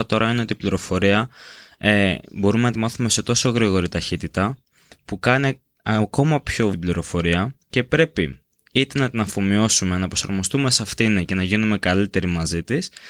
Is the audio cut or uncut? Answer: cut